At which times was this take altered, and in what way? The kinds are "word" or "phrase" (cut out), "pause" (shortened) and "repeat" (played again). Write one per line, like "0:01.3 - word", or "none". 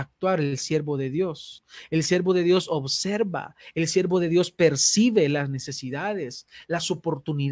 none